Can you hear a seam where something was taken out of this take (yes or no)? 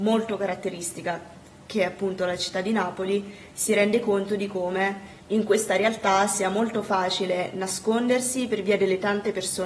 yes